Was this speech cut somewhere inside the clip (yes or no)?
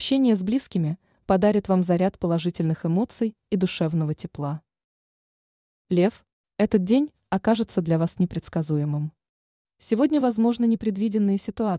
no